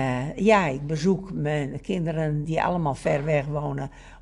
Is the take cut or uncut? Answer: cut